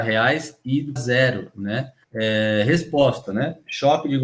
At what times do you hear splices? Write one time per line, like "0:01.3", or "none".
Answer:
0:01.0
0:02.0